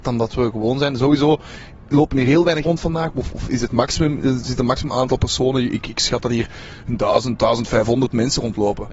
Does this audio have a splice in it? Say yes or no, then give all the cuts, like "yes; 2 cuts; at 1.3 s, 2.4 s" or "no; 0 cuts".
yes; 1 cut; at 2.6 s